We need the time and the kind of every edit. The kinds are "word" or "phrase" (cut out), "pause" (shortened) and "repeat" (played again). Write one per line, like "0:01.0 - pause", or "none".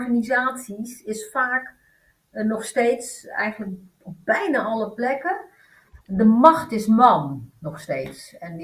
0:06.0 - pause